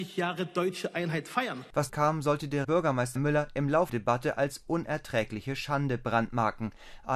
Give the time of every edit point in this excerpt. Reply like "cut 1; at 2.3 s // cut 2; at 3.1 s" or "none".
cut 1; at 1.9 s // cut 2; at 2.6 s // cut 3; at 3.2 s // cut 4; at 3.9 s

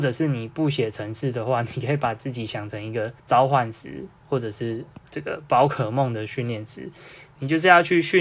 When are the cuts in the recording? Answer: cut 1; at 3.2 s // cut 2; at 5.1 s

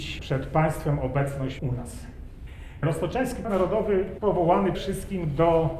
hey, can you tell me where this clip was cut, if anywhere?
cut 1; at 1.6 s // cut 2; at 3.4 s // cut 3; at 4.7 s

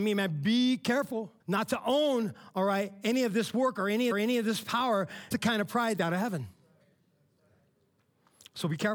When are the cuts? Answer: cut 1; at 1.4 s // cut 2; at 4.1 s // cut 3; at 5.3 s // cut 4; at 6.0 s

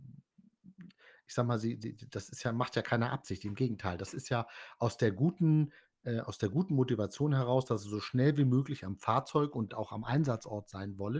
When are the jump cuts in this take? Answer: cut 1; at 9.7 s

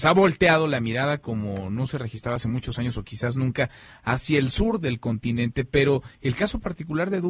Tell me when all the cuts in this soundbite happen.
none

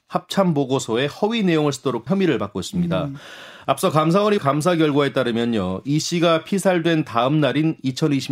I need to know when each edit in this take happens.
cut 1; at 2.1 s // cut 2; at 4.4 s

